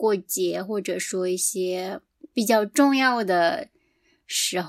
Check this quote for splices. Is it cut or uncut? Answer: uncut